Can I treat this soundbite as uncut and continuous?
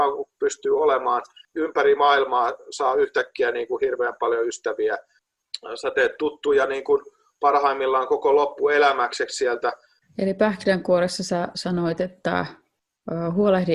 yes; 0 cuts

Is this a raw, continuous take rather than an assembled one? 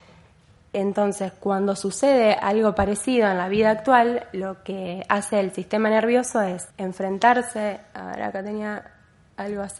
no; 1 cut; at 6.7 s

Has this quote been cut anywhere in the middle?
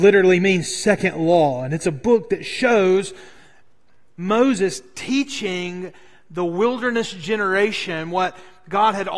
no; 0 cuts

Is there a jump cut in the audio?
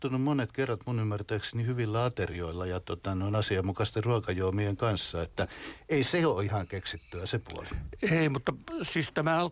no; 0 cuts

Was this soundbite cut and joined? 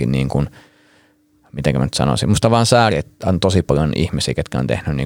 no; 0 cuts

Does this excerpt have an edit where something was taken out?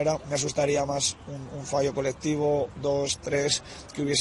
no; 0 cuts

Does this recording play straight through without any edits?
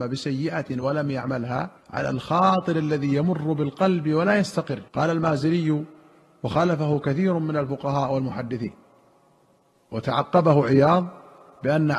no; 2 cuts; at 1.8 s, 4.9 s

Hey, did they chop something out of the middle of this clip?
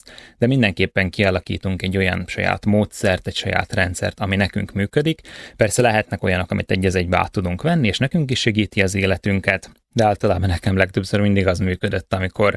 no; 0 cuts

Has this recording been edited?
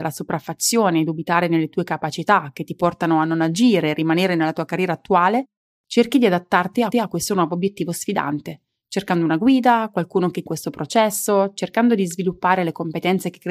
yes; 2 cuts; at 6.9 s, 10.5 s

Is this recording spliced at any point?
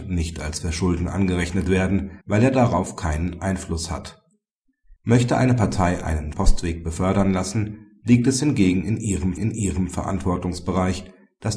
yes; 4 cuts; at 2.2 s, 5.0 s, 6.3 s, 9.4 s

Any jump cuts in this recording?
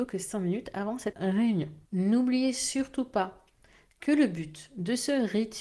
yes; 2 cuts; at 1.1 s, 1.9 s

